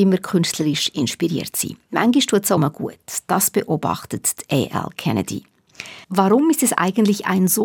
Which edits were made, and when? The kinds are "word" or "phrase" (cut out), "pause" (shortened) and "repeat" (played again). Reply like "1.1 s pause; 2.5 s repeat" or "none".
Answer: 2.6 s phrase; 6.0 s pause